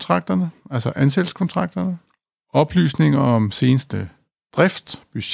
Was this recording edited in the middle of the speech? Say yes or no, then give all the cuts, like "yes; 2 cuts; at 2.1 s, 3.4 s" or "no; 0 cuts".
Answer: no; 0 cuts